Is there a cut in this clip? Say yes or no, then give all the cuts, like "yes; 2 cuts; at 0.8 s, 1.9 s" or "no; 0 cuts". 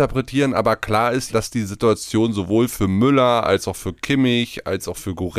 yes; 1 cut; at 1.3 s